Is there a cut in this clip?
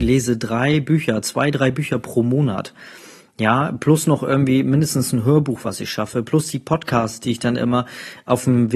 no; 0 cuts

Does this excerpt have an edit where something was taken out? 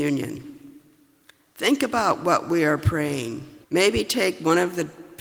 yes; 1 cut; at 3.6 s

